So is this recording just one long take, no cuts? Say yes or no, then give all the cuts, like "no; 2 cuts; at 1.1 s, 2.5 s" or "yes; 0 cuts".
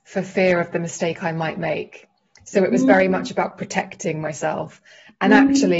yes; 0 cuts